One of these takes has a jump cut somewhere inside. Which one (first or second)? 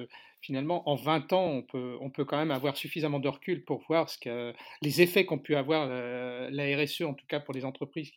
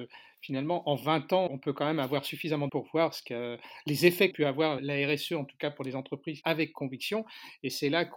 second